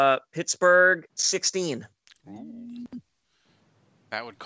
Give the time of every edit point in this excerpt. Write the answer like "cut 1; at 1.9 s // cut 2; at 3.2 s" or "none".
cut 1; at 1.1 s